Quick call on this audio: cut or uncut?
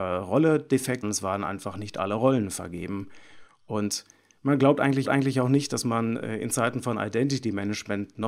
cut